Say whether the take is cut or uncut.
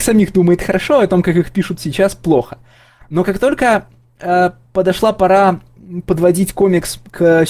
uncut